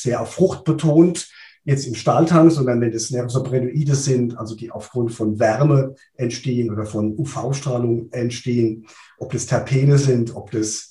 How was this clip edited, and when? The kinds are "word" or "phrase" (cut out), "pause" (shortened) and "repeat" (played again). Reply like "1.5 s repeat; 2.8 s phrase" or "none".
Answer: none